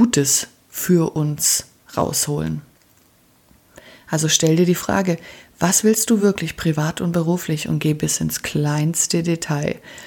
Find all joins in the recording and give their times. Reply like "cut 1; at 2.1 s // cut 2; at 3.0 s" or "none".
none